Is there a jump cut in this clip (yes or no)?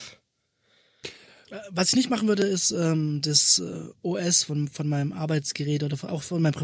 no